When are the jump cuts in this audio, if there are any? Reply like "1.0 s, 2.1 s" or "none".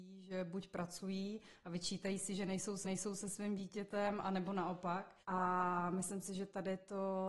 2.8 s, 5.2 s